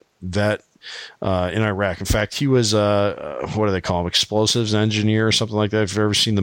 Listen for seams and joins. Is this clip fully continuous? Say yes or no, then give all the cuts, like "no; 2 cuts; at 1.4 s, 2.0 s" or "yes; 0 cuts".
yes; 0 cuts